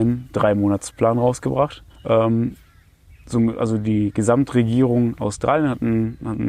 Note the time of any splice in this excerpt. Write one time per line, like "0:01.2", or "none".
0:01.9